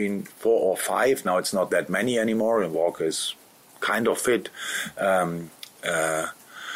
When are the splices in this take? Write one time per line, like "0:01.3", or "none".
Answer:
none